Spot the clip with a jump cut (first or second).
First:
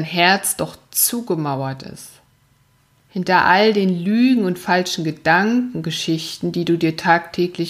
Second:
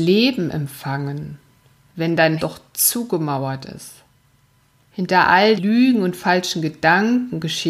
second